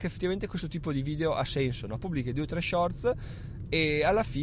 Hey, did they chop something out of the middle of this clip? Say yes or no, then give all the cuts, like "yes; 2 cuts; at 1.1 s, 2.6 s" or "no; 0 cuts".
no; 0 cuts